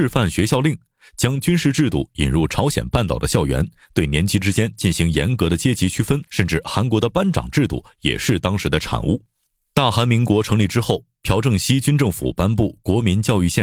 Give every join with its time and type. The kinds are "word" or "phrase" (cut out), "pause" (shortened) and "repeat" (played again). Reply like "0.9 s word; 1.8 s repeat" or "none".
6.3 s pause; 9.6 s pause